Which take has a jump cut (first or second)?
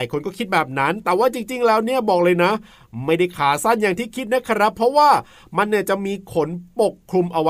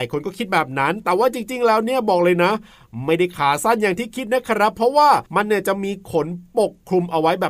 second